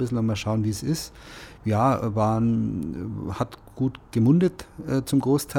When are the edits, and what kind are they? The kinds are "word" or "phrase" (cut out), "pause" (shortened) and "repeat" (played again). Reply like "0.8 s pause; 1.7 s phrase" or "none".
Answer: none